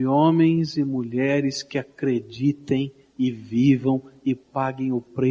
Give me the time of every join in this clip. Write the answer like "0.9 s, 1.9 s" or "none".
none